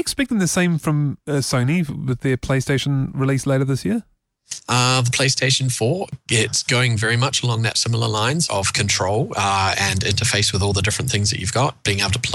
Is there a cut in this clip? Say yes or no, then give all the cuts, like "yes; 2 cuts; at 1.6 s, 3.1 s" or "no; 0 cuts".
yes; 1 cut; at 8.5 s